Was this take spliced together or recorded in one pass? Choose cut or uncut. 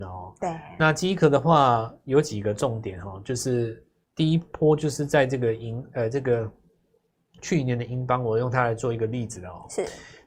uncut